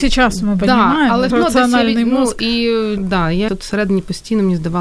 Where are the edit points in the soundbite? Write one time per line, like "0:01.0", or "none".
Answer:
0:01.3
0:03.0
0:03.5